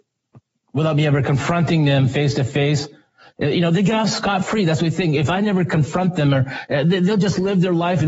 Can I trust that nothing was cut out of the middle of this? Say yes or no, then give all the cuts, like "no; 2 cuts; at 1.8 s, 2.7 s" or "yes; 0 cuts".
yes; 0 cuts